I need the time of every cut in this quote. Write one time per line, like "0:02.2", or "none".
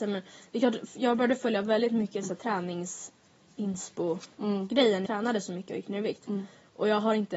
0:05.1